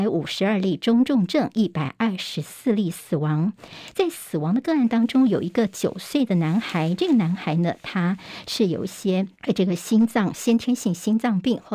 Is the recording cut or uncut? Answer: cut